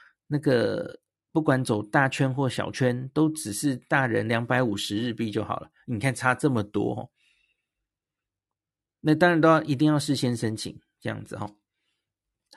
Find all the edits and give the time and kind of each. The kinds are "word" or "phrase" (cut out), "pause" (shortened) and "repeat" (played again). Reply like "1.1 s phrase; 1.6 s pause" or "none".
none